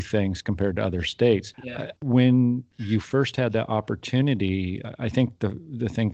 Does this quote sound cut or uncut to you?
cut